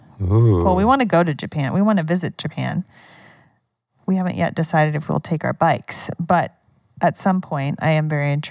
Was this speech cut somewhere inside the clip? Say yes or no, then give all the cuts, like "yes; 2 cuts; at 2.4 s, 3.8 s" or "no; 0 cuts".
no; 0 cuts